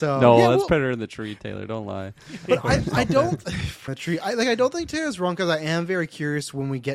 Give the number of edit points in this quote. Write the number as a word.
one